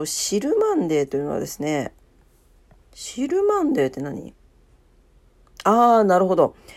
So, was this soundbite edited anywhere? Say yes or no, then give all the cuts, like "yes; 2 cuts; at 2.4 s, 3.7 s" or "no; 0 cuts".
yes; 1 cut; at 2.6 s